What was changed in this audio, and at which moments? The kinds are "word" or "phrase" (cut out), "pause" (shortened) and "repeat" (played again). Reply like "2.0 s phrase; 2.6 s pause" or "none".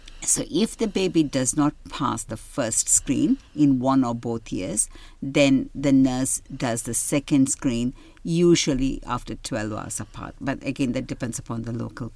none

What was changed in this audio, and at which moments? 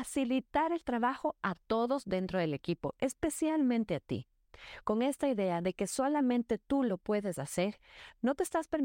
none

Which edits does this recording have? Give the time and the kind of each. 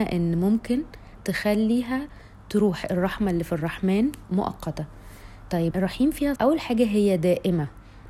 1.2 s word; 5.7 s word; 6.4 s word

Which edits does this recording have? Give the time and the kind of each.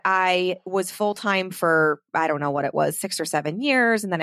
none

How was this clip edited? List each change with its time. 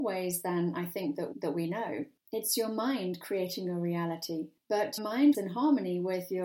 1.3 s word; 5.0 s word; 5.3 s word

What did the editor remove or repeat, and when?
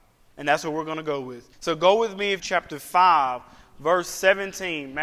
1.5 s pause; 2.4 s phrase

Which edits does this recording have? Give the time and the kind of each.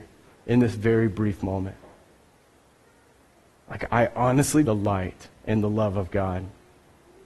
3.9 s word; 4.6 s phrase

